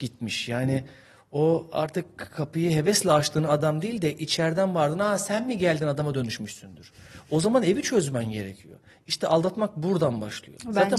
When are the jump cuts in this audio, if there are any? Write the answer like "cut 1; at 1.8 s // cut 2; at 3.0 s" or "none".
none

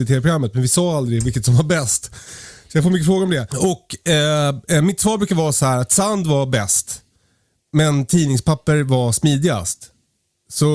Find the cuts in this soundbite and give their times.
none

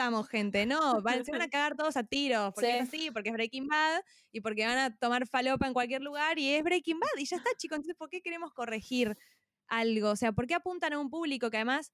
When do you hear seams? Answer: none

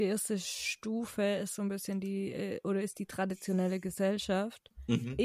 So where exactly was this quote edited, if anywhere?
none

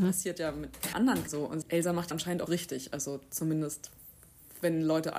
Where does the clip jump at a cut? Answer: cut 1; at 0.9 s // cut 2; at 1.3 s // cut 3; at 1.6 s // cut 4; at 2.1 s // cut 5; at 2.5 s

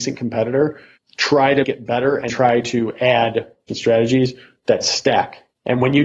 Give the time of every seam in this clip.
cut 1; at 1.0 s // cut 2; at 1.6 s // cut 3; at 2.3 s // cut 4; at 3.7 s

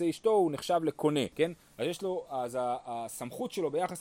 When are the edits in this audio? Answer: cut 1; at 1.3 s

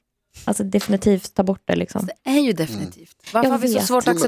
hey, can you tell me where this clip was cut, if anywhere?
none

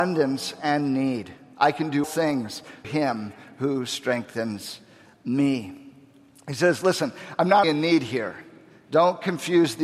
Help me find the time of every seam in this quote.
cut 1; at 2.0 s // cut 2; at 2.8 s // cut 3; at 7.6 s

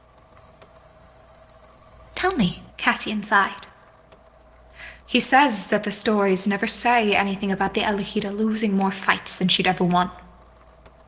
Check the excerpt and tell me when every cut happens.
cut 1; at 2.7 s // cut 2; at 5.0 s

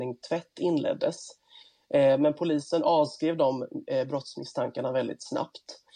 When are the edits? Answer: none

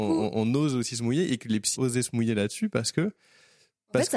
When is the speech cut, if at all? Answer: cut 1; at 1.8 s

